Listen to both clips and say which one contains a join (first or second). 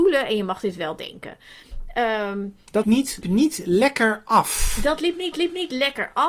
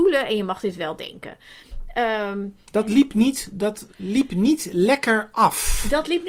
first